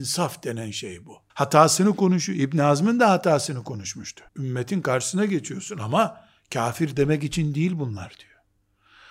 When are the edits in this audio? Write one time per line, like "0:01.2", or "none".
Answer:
0:01.3
0:04.3